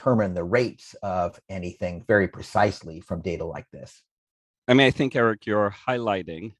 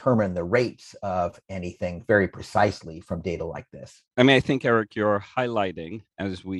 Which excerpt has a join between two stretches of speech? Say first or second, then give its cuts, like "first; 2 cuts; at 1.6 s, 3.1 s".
second; 1 cut; at 4.1 s